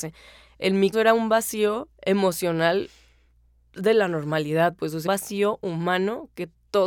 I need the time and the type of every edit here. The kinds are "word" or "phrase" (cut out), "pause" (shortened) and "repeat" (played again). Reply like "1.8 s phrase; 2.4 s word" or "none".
0.9 s word; 1.9 s pause; 5.1 s word